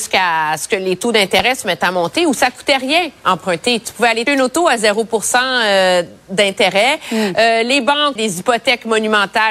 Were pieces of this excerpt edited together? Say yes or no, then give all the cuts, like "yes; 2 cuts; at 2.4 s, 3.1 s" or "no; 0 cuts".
yes; 2 cuts; at 4.3 s, 8.2 s